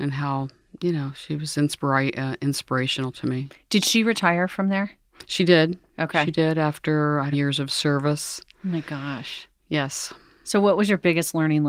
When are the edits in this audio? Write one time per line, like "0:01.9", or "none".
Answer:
0:07.3